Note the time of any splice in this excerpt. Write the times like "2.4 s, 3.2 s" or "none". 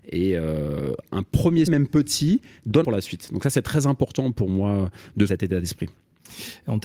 1.7 s, 2.8 s, 5.3 s